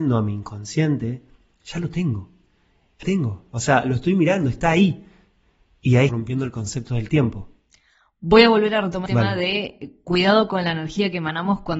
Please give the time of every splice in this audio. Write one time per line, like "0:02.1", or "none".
0:03.0
0:06.1
0:09.1